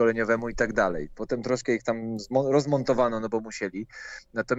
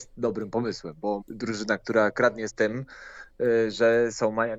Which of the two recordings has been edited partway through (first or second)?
second